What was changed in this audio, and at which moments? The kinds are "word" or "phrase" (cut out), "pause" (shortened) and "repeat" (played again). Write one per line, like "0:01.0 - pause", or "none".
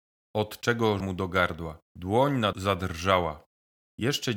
0:01.0 - phrase
0:01.8 - pause
0:02.5 - word